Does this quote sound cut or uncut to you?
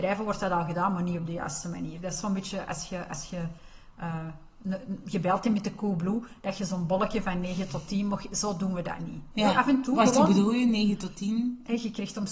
uncut